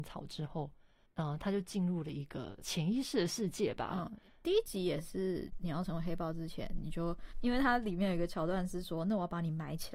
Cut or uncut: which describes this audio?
uncut